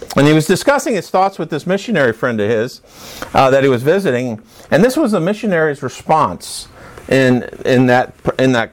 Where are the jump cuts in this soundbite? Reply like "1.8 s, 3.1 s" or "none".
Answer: none